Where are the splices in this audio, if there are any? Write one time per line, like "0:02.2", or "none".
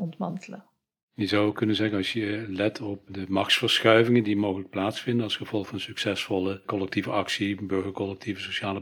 0:03.1